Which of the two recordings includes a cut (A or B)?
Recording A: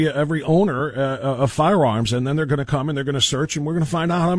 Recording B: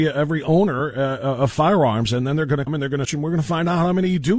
B